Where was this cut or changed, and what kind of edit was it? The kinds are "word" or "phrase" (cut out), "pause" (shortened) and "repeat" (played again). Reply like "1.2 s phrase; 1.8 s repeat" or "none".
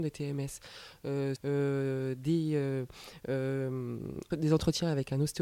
1.4 s word; 4.3 s word